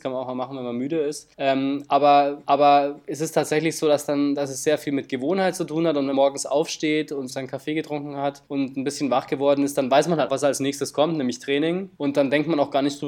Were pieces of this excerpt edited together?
yes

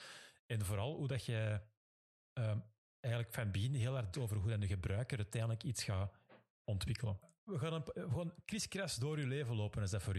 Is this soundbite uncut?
no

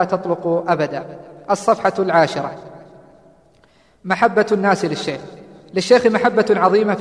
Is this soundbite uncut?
yes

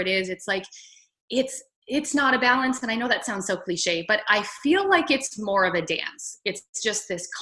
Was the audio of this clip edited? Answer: no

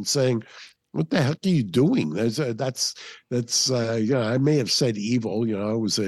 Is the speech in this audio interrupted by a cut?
no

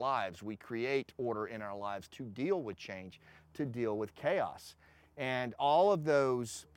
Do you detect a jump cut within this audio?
no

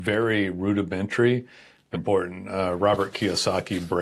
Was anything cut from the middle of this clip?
yes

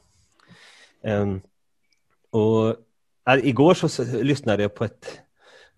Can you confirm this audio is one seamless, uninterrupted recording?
yes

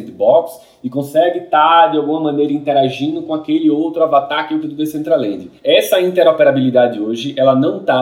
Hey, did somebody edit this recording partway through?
yes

